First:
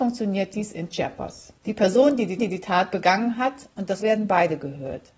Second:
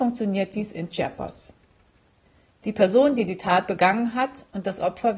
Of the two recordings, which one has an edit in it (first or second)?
first